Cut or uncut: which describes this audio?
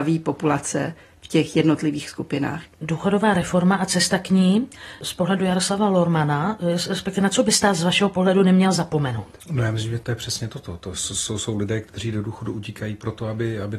uncut